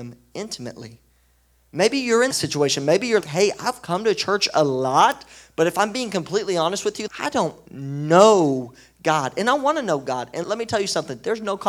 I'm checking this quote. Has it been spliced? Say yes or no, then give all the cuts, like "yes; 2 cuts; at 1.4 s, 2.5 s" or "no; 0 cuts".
yes; 4 cuts; at 2.3 s, 3.2 s, 7.1 s, 10.4 s